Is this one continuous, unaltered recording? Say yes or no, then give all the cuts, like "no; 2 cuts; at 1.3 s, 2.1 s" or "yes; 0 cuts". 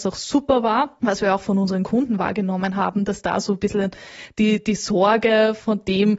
yes; 0 cuts